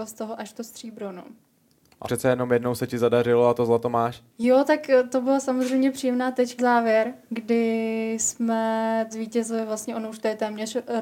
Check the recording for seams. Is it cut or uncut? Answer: cut